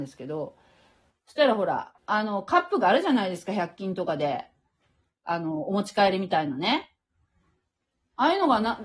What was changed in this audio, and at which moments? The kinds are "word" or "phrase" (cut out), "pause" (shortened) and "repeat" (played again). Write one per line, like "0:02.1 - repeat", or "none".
0:02.0 - phrase